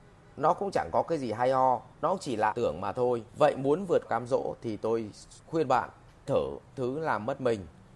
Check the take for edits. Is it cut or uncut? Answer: cut